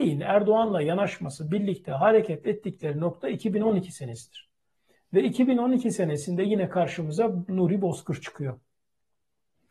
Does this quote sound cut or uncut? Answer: uncut